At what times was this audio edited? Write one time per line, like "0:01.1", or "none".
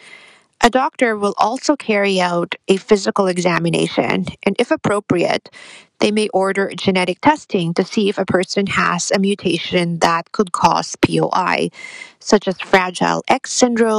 none